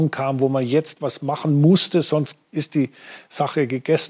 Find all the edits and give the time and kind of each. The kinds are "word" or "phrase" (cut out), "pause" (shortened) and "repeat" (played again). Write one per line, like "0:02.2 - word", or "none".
0:02.4 - pause